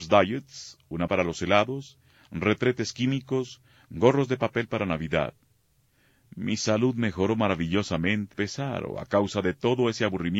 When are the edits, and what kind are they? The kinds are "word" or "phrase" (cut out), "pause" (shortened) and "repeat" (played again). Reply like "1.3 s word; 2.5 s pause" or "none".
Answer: 1.1 s word; 8.3 s word

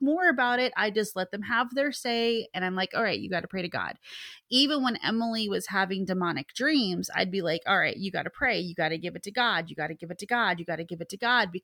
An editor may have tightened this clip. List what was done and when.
none

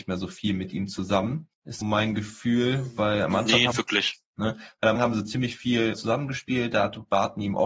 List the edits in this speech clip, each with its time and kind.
1.8 s word; 3.7 s word; 5.0 s word; 5.9 s word

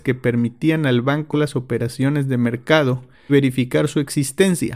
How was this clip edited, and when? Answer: 1.3 s word; 3.3 s word

